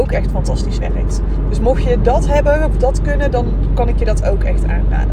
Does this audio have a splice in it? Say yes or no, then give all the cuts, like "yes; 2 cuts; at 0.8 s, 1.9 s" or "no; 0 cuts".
no; 0 cuts